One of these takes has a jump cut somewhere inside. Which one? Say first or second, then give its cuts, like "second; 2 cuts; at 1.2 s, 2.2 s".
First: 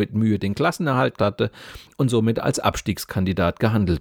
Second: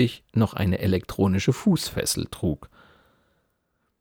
first; 1 cut; at 1.2 s